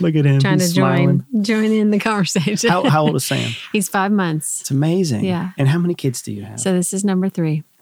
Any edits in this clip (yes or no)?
no